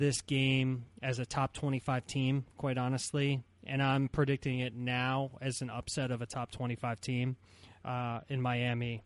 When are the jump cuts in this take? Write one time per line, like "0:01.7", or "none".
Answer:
none